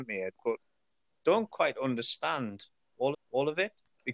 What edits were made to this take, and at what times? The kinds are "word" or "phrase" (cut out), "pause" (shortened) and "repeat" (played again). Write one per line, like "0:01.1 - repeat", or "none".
0:03.1 - repeat